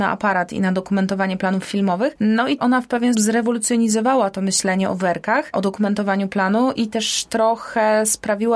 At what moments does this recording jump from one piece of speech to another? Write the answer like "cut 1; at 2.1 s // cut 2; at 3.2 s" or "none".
cut 1; at 2.6 s // cut 2; at 3.1 s